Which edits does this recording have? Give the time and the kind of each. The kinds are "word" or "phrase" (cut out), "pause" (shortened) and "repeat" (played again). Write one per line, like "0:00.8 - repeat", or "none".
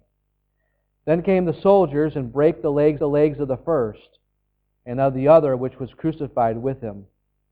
0:03.0 - repeat